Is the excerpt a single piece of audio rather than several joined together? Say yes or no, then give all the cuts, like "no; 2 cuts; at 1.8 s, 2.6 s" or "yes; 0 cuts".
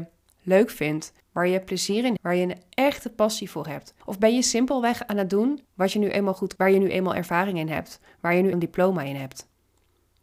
no; 6 cuts; at 1.2 s, 2.2 s, 4.0 s, 5.6 s, 6.6 s, 8.5 s